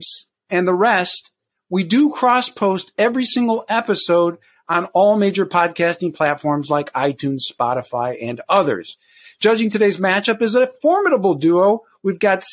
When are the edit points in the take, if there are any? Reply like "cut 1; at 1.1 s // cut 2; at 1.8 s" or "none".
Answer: none